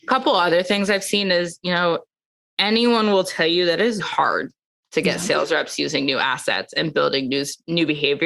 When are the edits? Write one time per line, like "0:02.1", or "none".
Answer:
0:04.0